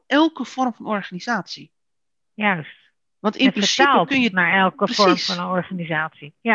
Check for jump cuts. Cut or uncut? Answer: uncut